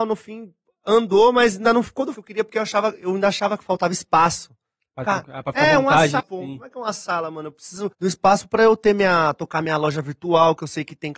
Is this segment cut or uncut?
cut